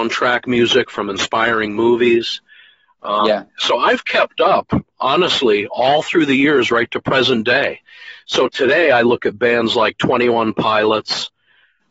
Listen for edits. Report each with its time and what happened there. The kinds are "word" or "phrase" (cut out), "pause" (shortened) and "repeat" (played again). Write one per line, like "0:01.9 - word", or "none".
0:03.5 - pause